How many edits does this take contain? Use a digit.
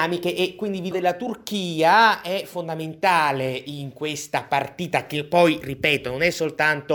1